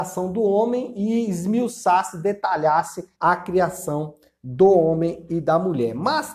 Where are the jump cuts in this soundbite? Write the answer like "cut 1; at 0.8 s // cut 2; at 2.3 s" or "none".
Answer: cut 1; at 3.1 s